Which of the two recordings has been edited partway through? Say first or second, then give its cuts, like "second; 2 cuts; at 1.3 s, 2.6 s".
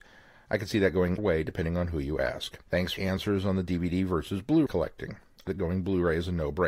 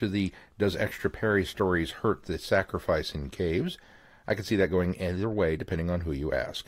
first; 5 cuts; at 1.2 s, 2.6 s, 3.0 s, 4.7 s, 5.5 s